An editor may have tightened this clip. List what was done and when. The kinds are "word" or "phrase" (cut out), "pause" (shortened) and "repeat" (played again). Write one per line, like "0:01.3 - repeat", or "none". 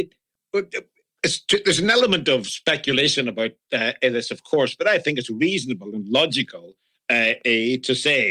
none